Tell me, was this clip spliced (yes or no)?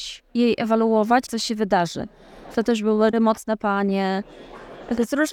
yes